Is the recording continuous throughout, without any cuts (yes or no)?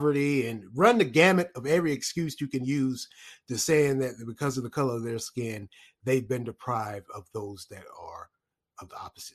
yes